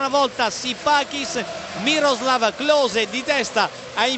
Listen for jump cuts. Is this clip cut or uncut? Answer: uncut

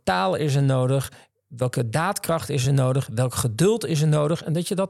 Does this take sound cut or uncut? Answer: uncut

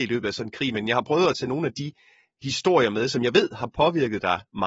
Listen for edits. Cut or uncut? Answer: uncut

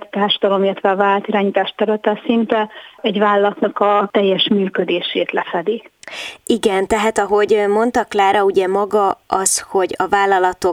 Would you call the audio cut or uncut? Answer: uncut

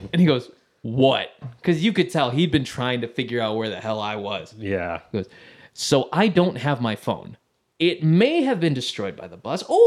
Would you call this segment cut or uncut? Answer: uncut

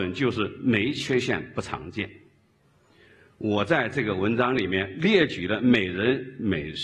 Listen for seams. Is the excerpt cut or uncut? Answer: uncut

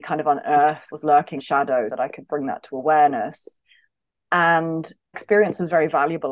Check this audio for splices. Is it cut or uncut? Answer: cut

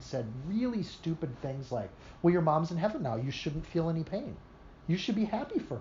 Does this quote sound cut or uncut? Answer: uncut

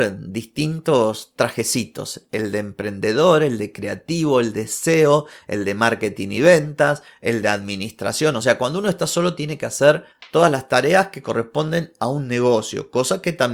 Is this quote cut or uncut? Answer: uncut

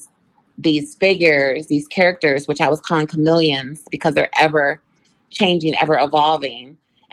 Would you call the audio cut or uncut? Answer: uncut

